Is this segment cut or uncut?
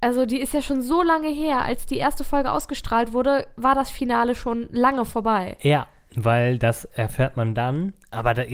uncut